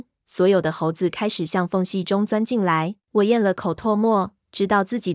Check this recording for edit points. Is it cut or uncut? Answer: cut